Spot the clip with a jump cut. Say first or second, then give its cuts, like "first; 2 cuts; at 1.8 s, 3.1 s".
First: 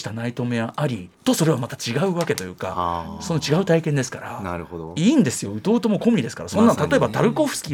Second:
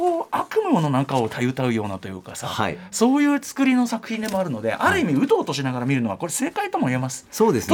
first; 1 cut; at 1.1 s